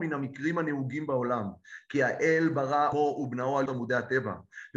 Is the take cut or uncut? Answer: cut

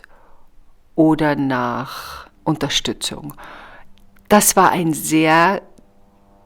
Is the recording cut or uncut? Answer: cut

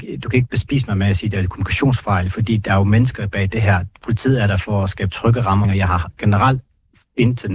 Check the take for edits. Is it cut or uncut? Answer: cut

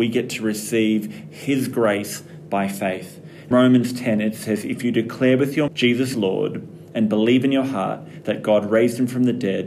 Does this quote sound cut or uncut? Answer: cut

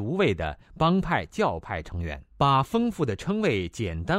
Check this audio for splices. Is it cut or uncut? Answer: cut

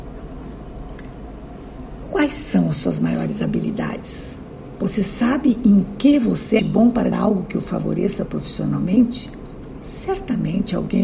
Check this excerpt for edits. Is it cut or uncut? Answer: cut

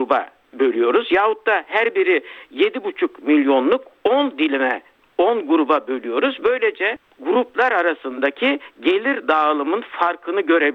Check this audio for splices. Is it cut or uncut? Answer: uncut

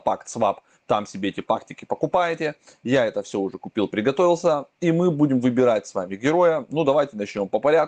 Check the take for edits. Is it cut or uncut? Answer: uncut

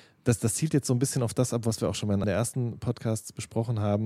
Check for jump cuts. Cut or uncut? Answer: cut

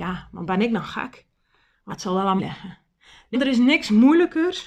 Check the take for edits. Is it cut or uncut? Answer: cut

